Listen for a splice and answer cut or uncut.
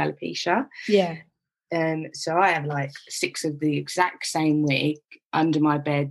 uncut